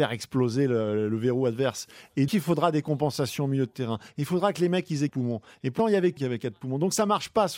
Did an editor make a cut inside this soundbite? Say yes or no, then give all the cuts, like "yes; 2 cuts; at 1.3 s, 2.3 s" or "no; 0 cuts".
yes; 4 cuts; at 2.3 s, 5.1 s, 5.8 s, 6.2 s